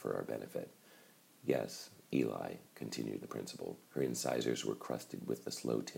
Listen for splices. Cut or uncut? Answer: cut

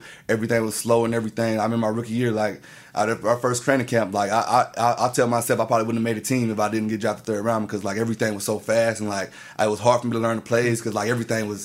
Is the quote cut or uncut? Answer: uncut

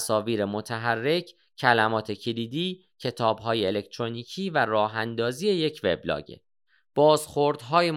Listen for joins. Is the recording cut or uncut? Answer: uncut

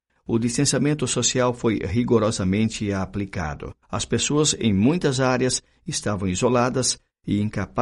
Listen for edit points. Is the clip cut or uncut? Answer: cut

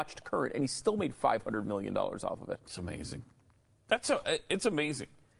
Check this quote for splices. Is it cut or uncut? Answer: uncut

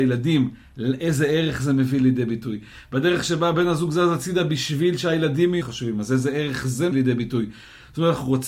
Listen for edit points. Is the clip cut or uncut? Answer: cut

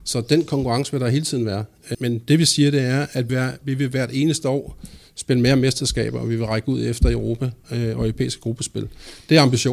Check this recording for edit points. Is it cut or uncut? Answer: cut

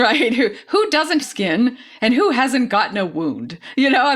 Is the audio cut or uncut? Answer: cut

